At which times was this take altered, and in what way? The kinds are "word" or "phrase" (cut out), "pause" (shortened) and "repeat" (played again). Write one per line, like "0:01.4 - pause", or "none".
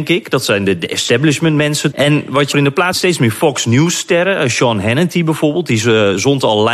0:01.9 - word
0:02.5 - word
0:02.9 - word